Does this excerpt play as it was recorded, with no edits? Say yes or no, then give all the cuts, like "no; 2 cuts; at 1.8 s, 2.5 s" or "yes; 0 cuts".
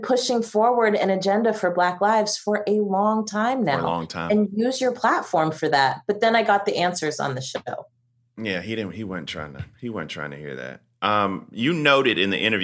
yes; 0 cuts